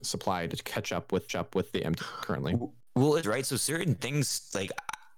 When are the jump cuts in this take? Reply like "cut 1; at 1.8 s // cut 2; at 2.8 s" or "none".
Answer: cut 1; at 1.3 s // cut 2; at 2.0 s // cut 3; at 3.2 s